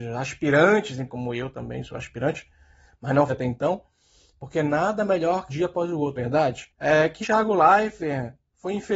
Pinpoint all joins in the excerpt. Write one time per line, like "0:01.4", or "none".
0:01.1
0:03.3
0:05.5
0:06.2
0:07.2